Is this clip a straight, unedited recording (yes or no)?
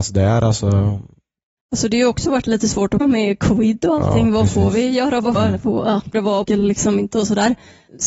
no